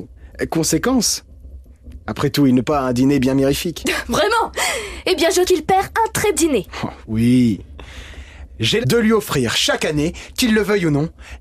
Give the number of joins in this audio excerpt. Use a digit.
4